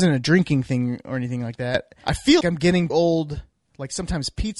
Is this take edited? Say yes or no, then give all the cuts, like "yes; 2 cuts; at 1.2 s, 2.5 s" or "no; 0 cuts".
yes; 2 cuts; at 2.4 s, 2.9 s